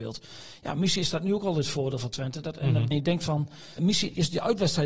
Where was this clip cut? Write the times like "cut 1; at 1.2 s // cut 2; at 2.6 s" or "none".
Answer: cut 1; at 2.9 s // cut 2; at 3.8 s